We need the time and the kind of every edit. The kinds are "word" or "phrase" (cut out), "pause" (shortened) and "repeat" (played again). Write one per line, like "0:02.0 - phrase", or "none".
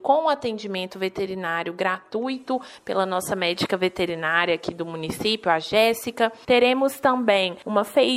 none